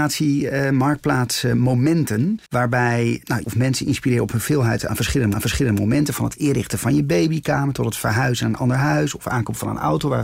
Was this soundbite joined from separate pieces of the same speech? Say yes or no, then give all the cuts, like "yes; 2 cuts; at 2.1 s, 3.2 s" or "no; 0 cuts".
yes; 4 cuts; at 2.5 s, 3.4 s, 4.9 s, 5.3 s